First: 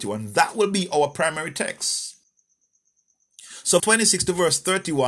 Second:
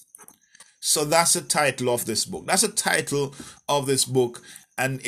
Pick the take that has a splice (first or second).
first